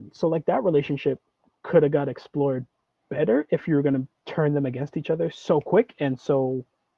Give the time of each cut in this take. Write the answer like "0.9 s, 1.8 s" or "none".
none